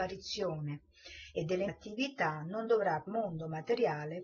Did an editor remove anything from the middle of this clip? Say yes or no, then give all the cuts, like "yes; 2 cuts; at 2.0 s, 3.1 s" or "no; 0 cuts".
yes; 2 cuts; at 1.7 s, 3.1 s